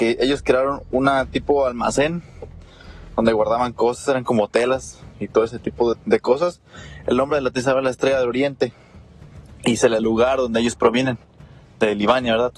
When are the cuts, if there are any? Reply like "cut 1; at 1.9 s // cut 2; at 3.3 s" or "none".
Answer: cut 1; at 5.9 s // cut 2; at 10.0 s